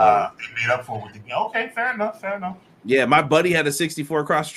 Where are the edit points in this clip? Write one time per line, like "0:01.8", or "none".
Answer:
none